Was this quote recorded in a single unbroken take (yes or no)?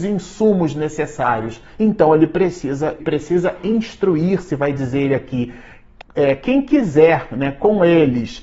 no